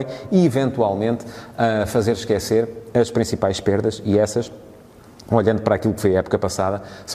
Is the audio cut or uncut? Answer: uncut